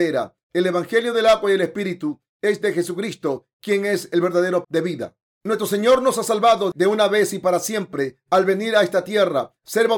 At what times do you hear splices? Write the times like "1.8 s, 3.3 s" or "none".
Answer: 4.6 s